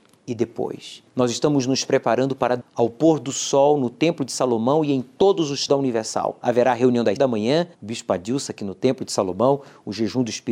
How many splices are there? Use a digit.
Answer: 5